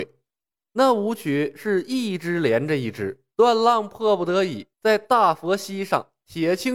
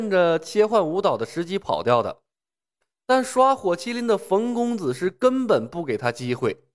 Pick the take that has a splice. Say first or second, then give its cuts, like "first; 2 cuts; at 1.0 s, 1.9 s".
first; 2 cuts; at 3.3 s, 4.7 s